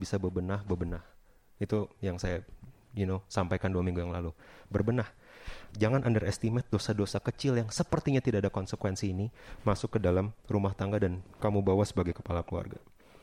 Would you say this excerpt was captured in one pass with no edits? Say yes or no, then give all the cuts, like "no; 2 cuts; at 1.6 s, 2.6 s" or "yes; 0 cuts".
yes; 0 cuts